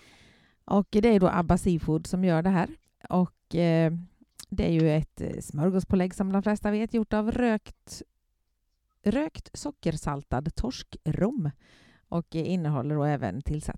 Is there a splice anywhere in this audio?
no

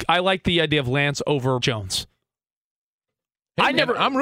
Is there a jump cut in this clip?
yes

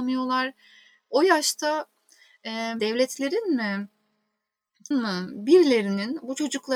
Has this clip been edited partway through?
yes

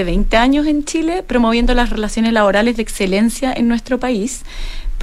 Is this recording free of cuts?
yes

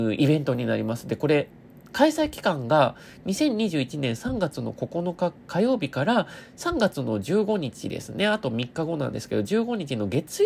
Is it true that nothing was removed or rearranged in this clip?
yes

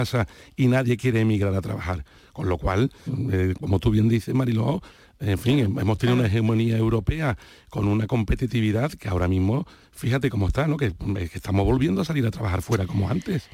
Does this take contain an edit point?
yes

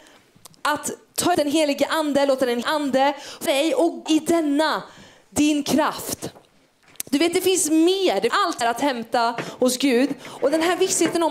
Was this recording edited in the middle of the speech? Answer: yes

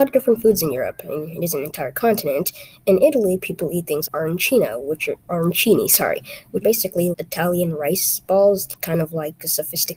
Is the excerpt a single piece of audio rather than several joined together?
no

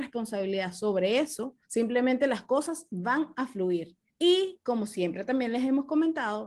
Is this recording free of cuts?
no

